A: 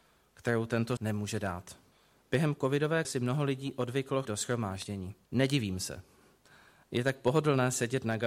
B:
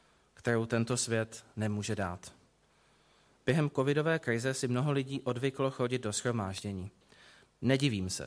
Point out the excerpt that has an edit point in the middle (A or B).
A